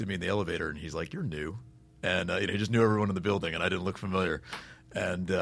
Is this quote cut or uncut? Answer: uncut